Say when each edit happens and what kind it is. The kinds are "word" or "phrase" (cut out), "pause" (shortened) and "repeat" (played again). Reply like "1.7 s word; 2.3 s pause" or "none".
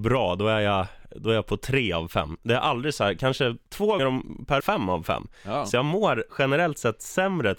4.0 s word; 4.6 s phrase; 6.3 s pause